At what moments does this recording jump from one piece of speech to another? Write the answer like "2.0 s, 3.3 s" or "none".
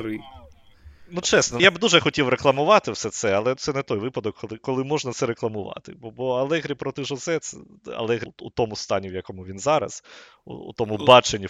1.6 s, 3.6 s, 4.6 s, 8.3 s